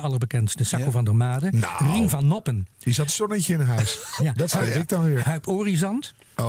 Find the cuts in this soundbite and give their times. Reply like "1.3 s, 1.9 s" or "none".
3.1 s, 4.2 s, 5.2 s